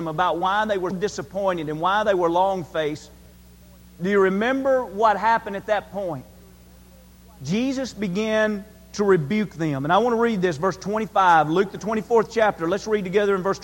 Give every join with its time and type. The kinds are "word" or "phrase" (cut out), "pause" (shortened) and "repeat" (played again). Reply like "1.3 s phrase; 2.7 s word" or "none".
0.9 s word